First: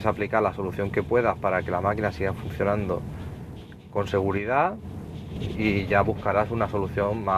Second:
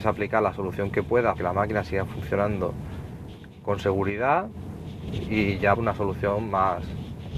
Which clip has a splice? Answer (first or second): second